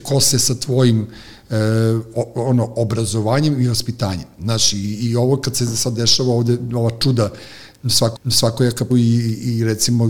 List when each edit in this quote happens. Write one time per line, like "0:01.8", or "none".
0:08.1
0:08.9